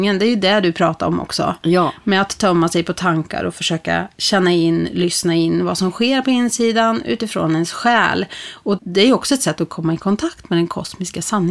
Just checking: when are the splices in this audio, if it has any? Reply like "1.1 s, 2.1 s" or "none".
8.8 s